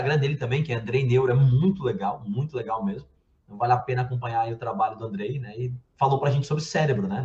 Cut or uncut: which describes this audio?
uncut